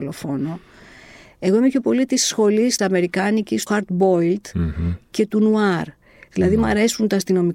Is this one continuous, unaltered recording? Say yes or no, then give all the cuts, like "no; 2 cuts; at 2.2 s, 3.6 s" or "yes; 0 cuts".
no; 2 cuts; at 2.8 s, 3.7 s